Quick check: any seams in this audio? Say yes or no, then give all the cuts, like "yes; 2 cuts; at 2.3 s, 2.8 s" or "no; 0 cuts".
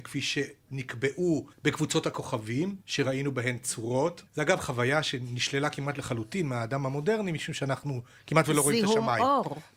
yes; 3 cuts; at 1.5 s, 2.8 s, 4.3 s